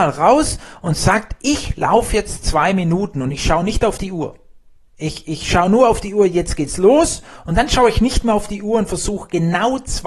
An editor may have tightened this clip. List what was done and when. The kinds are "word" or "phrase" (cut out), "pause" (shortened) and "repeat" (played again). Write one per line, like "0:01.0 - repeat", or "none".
0:04.8 - pause

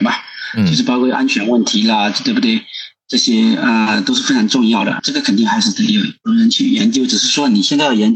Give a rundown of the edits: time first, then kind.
0:05.0 - word
0:06.2 - pause

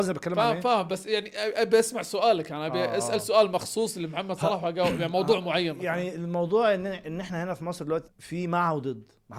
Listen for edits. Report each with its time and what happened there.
0:08.1 - word

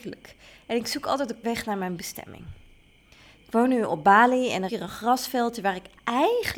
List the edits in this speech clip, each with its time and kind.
0:01.4 - word
0:04.7 - word

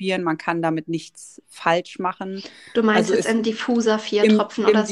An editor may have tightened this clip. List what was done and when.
none

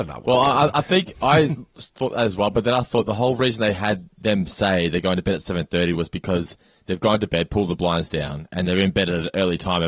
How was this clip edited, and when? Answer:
none

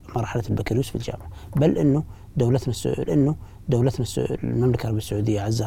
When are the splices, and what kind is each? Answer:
0:03.1 - repeat

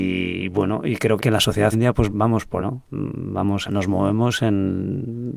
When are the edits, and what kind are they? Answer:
0:01.2 - word
0:01.7 - word
0:02.1 - word
0:02.6 - word
0:03.7 - word

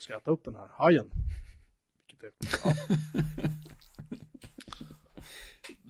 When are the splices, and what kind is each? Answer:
0:02.3 - pause

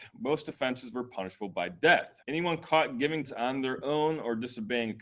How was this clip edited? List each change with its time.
0:02.2 - pause
0:03.3 - word

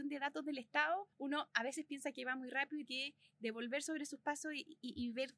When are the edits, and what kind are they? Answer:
0:01.1 - pause
0:02.9 - word

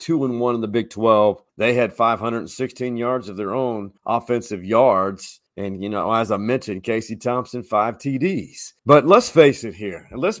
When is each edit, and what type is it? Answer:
0:01.5 - pause
0:04.0 - pause
0:05.5 - pause
0:08.8 - pause

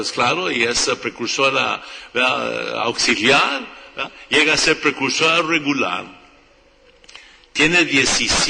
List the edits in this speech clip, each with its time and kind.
none

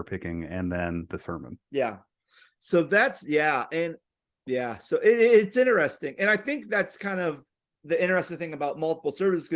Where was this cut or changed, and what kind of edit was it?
0:01.6 - pause

